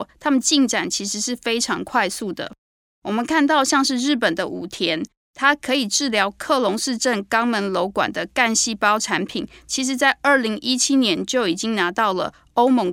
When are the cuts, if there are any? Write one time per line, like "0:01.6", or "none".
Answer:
none